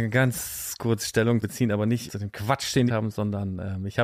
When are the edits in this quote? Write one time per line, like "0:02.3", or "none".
0:01.4
0:02.1
0:02.9

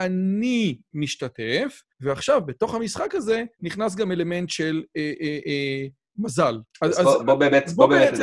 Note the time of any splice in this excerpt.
0:01.9
0:03.5
0:06.7

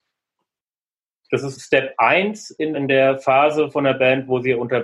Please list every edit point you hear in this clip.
0:01.5
0:02.7

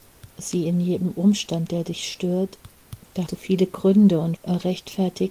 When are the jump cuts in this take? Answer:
0:03.3
0:04.4

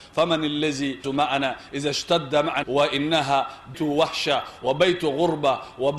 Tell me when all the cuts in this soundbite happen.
0:01.0
0:02.6
0:03.7

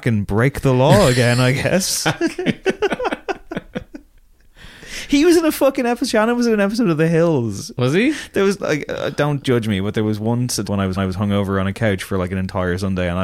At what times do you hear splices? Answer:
0:10.6
0:11.0

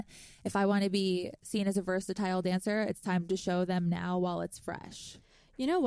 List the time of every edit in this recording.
none

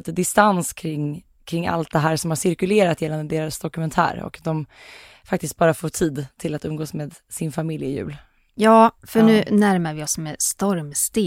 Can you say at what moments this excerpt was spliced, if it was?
none

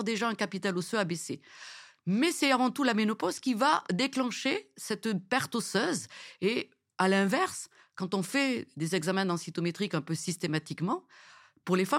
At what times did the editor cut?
none

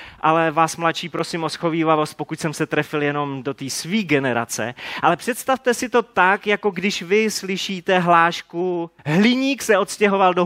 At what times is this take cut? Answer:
0:09.0

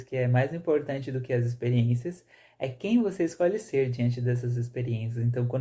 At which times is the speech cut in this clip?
none

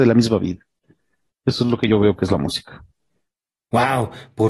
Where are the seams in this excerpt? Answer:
none

